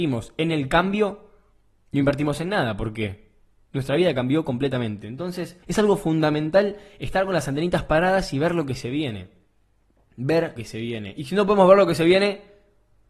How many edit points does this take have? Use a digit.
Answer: 2